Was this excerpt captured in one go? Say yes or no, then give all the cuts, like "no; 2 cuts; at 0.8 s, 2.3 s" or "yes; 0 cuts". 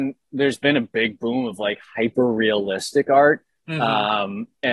yes; 0 cuts